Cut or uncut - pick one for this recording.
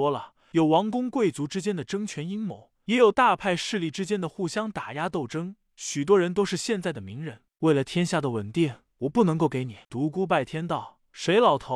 cut